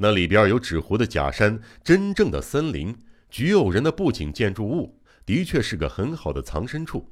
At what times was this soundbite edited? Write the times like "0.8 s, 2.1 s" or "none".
none